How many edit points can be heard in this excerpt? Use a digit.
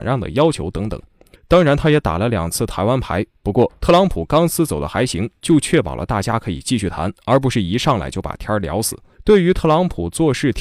2